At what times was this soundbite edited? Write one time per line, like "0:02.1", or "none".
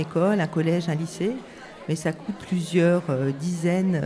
0:02.4